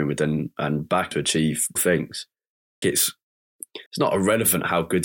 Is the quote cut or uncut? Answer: cut